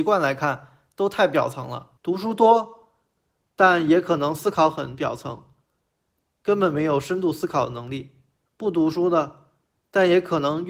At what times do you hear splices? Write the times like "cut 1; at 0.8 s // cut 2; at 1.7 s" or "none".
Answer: cut 1; at 2.0 s

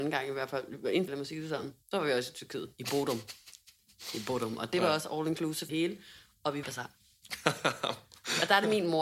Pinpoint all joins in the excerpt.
cut 1; at 1.1 s // cut 2; at 1.8 s // cut 3; at 5.7 s // cut 4; at 6.6 s

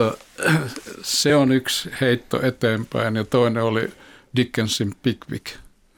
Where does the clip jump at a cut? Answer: none

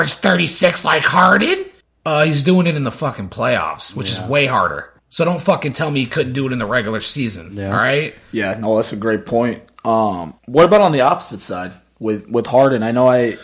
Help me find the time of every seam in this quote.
cut 1; at 1.8 s // cut 2; at 5.0 s // cut 3; at 10.4 s

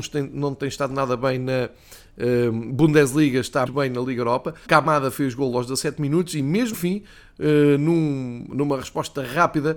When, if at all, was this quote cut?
cut 1; at 3.7 s // cut 2; at 4.7 s // cut 3; at 6.7 s

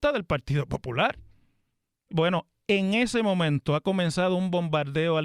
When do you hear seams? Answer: cut 1; at 2.1 s

